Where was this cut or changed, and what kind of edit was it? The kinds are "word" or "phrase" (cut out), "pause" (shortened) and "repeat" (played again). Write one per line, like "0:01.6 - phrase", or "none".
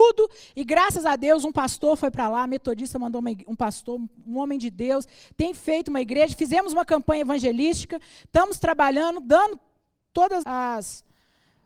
0:10.4 - word